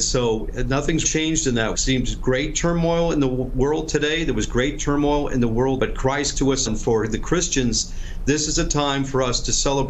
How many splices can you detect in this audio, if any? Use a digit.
5